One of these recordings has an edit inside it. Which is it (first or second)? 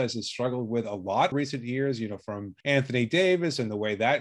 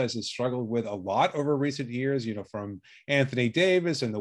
first